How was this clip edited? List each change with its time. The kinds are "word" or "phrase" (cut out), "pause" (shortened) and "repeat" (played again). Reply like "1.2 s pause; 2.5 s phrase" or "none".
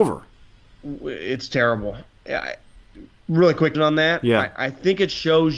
3.7 s word